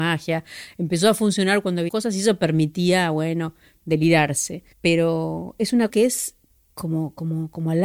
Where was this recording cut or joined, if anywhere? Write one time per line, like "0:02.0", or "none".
0:01.9
0:04.7
0:05.9

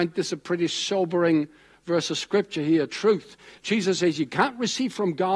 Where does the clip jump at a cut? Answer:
none

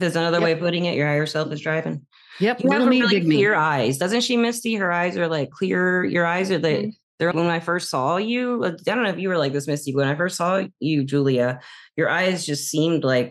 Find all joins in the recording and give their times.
0:05.5
0:07.3

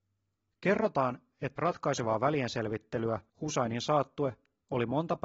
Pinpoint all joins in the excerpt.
0:01.6
0:03.3

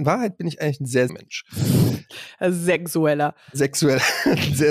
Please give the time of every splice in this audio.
0:01.1

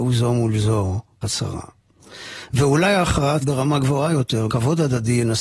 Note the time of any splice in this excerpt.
0:01.2
0:03.4
0:04.5

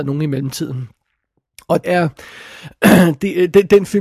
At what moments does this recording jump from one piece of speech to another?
0:01.8

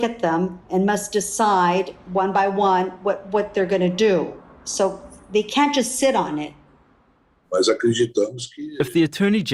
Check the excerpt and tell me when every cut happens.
none

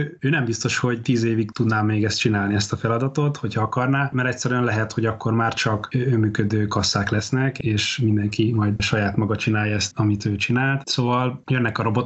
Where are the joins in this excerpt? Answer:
0:09.9

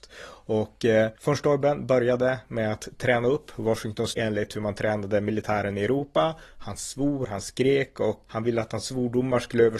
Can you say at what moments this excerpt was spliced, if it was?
0:01.2
0:04.1
0:08.3

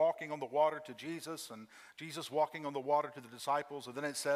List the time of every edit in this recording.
none

